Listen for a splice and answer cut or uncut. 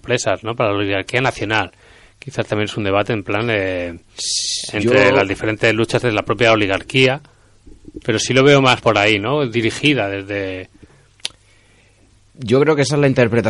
cut